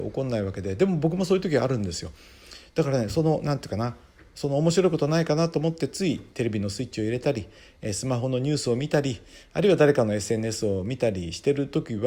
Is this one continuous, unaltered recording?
yes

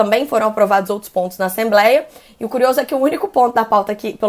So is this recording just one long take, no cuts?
yes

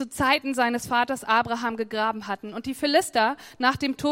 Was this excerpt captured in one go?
yes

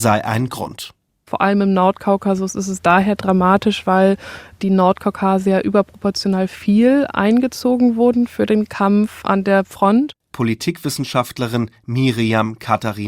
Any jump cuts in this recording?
yes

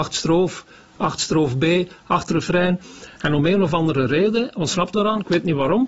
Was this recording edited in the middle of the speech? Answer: yes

